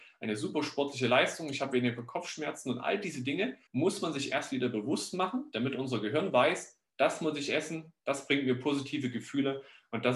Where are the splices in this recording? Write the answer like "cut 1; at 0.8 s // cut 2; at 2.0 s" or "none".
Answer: cut 1; at 3.7 s // cut 2; at 6.9 s // cut 3; at 8.0 s